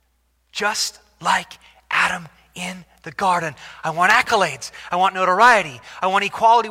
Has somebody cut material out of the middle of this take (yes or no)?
no